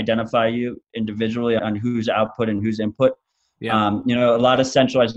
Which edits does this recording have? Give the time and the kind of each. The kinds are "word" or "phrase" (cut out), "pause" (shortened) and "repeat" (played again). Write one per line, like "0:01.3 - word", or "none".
0:01.6 - word